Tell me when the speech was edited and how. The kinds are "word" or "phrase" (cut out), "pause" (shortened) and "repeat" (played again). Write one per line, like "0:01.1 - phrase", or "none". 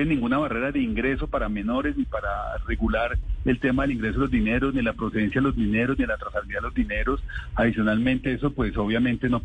0:08.2 - word